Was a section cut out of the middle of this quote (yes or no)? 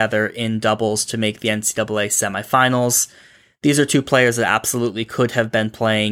no